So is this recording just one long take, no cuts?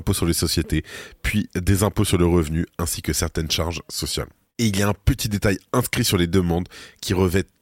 yes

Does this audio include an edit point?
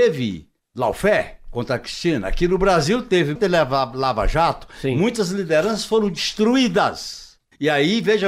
yes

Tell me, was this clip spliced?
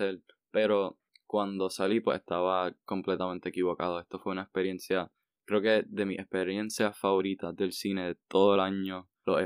no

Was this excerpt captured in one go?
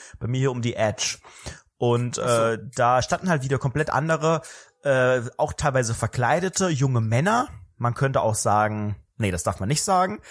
yes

